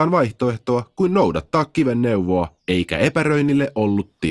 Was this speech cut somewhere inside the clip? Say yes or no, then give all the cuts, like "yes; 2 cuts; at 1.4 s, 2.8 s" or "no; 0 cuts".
yes; 1 cut; at 2.6 s